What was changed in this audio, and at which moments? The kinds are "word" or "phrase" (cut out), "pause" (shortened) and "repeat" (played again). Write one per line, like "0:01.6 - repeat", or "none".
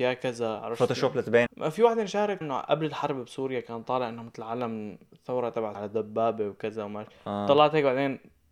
0:01.5 - phrase
0:02.4 - word
0:05.7 - word